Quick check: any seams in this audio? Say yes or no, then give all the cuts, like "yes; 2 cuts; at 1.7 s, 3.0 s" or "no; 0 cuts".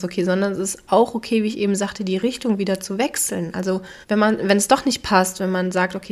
yes; 1 cut; at 4.0 s